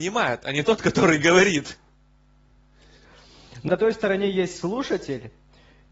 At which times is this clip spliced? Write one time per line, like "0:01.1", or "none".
0:03.7